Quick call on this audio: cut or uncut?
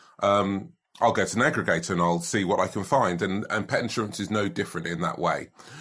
uncut